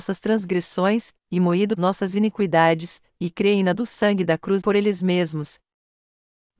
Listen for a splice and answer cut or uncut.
cut